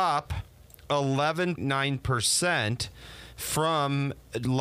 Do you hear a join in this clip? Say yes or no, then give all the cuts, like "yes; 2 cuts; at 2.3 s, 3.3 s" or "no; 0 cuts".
yes; 1 cut; at 1.6 s